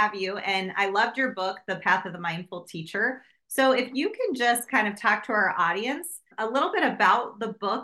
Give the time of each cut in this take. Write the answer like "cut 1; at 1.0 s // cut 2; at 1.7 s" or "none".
none